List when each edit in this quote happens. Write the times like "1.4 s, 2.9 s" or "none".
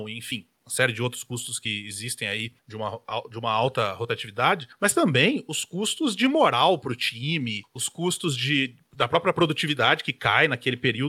none